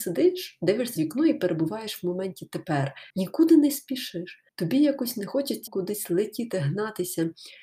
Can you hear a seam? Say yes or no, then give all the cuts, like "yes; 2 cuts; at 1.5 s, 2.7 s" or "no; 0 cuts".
yes; 4 cuts; at 1.0 s, 3.1 s, 4.5 s, 5.7 s